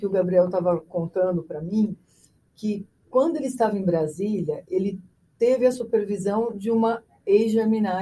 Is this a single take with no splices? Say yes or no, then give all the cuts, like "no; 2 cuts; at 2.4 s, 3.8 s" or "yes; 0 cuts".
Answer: yes; 0 cuts